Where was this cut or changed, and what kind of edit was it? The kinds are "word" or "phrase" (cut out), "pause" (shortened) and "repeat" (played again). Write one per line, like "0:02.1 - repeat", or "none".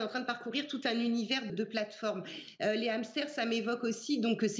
0:01.5 - word